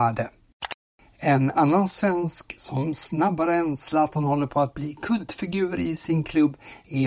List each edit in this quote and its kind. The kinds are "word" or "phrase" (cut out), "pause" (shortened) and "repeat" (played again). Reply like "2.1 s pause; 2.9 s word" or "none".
none